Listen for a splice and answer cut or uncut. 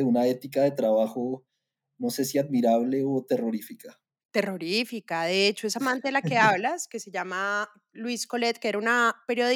uncut